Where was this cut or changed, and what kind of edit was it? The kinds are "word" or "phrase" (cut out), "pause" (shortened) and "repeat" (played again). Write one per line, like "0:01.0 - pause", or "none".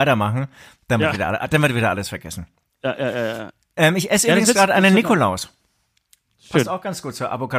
none